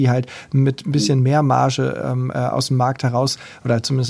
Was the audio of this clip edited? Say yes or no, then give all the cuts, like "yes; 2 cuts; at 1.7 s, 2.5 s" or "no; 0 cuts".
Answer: no; 0 cuts